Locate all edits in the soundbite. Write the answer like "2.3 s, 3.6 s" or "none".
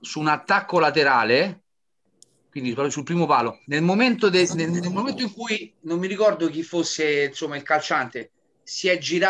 3.6 s